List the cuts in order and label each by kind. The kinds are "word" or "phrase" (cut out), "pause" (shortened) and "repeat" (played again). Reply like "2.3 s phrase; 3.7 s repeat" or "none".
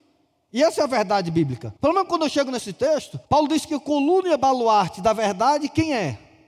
1.8 s pause; 3.2 s pause